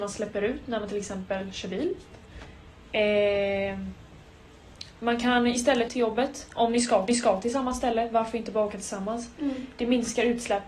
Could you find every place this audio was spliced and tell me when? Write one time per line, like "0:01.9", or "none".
0:05.9
0:07.1